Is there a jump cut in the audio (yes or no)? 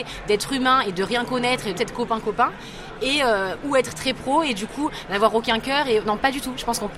yes